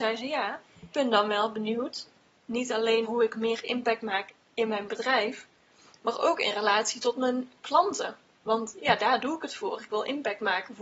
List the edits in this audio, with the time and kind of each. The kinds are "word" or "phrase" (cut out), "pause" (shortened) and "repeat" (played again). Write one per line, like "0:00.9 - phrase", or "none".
0:00.9 - word
0:03.0 - word